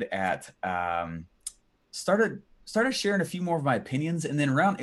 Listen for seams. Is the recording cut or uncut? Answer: uncut